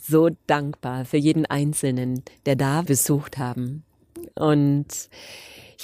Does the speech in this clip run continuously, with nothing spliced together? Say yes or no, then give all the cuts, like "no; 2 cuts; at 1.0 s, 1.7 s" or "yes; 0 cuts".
no; 1 cut; at 2.9 s